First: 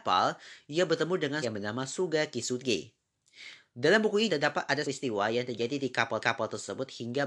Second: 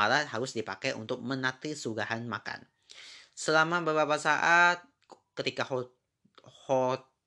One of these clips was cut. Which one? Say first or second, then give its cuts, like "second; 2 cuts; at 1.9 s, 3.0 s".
first; 4 cuts; at 1.4 s, 4.3 s, 4.8 s, 6.2 s